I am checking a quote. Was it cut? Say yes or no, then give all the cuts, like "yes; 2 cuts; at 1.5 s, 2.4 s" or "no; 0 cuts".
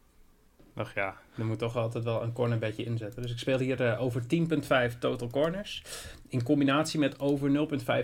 no; 0 cuts